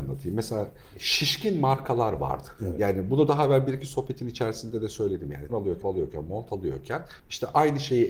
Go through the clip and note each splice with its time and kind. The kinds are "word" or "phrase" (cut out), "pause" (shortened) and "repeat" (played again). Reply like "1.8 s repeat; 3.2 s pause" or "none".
2.6 s pause; 5.5 s word; 5.8 s word; 7.2 s pause

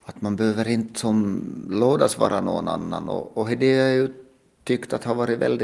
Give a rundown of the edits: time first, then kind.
none

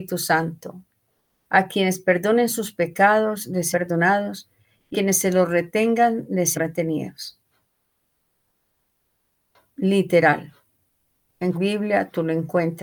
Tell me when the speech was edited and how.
3.7 s word; 4.9 s word; 6.5 s word; 11.5 s word

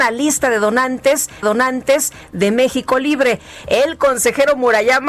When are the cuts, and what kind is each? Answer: 1.4 s repeat

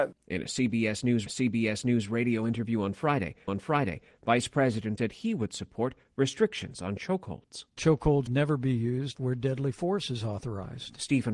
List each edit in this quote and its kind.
1.3 s repeat; 3.5 s repeat; 5.0 s word; 8.3 s word; 9.1 s word

